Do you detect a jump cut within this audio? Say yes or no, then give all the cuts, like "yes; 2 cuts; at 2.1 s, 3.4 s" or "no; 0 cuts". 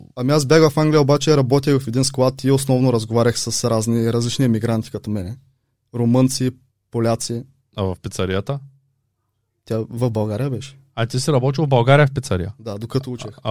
no; 0 cuts